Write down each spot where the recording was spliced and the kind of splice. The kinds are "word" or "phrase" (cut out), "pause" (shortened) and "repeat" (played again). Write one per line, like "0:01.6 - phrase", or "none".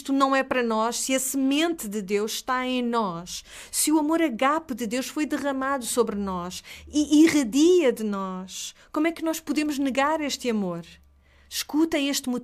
none